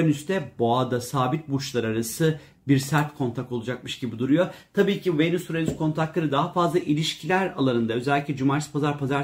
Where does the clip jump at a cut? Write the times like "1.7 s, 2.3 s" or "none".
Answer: none